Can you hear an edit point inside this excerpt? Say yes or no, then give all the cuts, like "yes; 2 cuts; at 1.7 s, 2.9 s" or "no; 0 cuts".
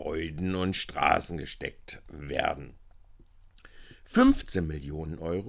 no; 0 cuts